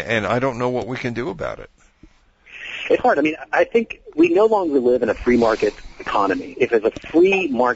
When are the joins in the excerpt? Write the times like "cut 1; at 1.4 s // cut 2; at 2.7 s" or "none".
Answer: cut 1; at 3.0 s // cut 2; at 4.1 s

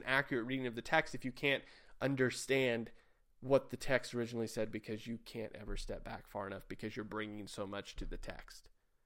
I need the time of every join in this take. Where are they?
none

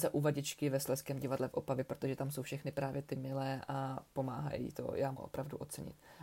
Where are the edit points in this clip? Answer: cut 1; at 5.1 s

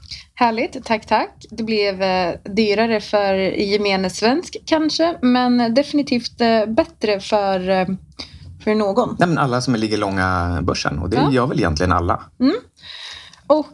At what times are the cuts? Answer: cut 1; at 12.3 s

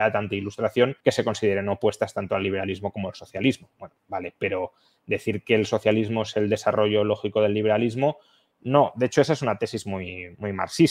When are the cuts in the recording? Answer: cut 1; at 1.0 s

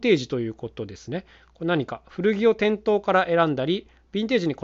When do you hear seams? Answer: none

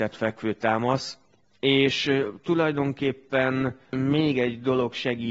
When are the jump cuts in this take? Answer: cut 1; at 3.8 s

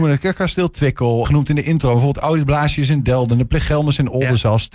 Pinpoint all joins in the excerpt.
cut 1; at 1.2 s

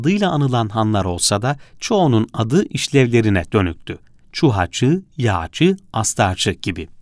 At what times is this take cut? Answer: none

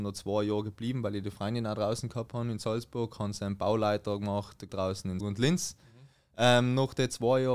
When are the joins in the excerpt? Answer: cut 1; at 4.7 s // cut 2; at 5.2 s

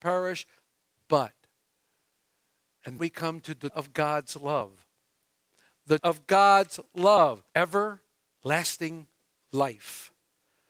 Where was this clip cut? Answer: cut 1; at 3.0 s // cut 2; at 3.7 s // cut 3; at 6.0 s // cut 4; at 7.5 s

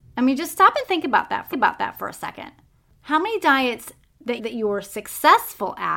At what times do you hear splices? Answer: cut 1; at 1.5 s // cut 2; at 4.4 s

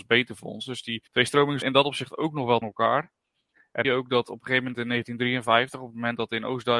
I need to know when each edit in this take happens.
cut 1; at 1.1 s // cut 2; at 1.6 s // cut 3; at 2.6 s // cut 4; at 3.8 s

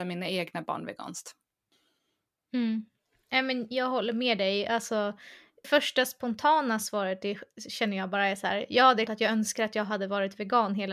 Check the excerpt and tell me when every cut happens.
cut 1; at 5.6 s // cut 2; at 9.1 s

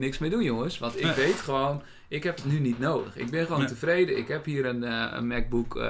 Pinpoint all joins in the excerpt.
none

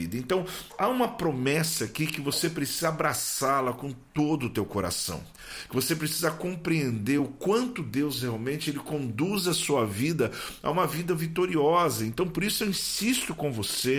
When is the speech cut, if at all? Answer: none

